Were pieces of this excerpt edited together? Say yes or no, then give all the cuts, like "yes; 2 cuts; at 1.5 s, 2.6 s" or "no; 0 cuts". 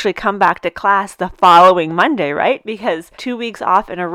yes; 1 cut; at 3.1 s